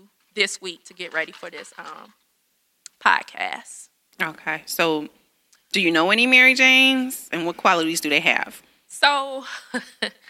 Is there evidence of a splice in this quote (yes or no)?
yes